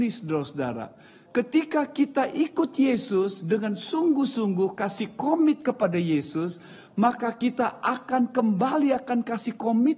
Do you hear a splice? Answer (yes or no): no